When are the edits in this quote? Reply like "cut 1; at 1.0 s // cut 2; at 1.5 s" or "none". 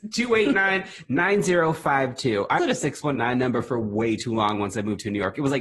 cut 1; at 2.6 s